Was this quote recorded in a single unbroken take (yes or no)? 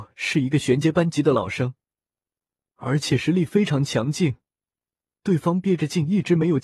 yes